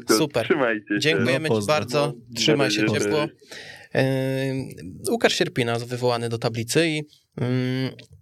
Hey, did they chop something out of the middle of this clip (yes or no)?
no